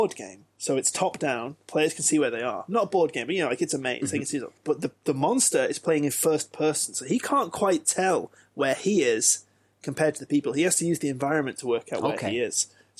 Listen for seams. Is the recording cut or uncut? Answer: cut